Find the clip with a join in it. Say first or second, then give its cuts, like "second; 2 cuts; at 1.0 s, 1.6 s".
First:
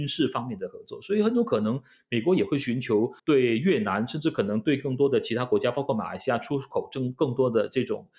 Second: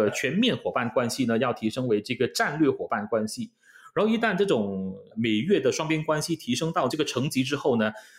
first; 1 cut; at 3.2 s